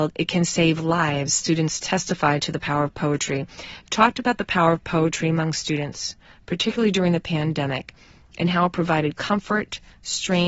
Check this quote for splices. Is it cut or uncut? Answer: uncut